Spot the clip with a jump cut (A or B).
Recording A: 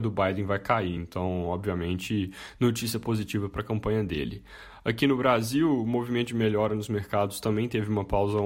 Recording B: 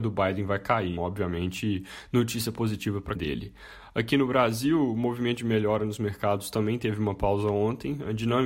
B